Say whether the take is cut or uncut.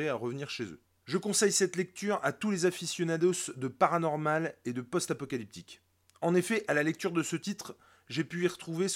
uncut